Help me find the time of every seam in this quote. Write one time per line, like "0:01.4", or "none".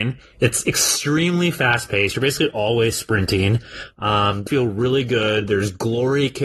0:04.5